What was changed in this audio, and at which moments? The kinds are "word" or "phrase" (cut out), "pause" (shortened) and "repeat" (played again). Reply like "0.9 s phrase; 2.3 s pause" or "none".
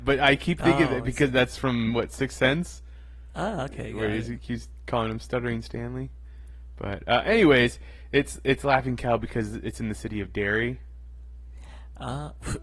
none